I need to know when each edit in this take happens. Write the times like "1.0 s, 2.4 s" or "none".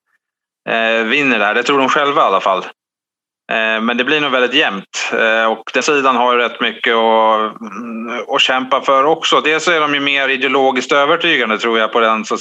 5.8 s